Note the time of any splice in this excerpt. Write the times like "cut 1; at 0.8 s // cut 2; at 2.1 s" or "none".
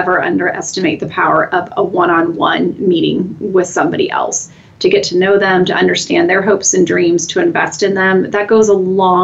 none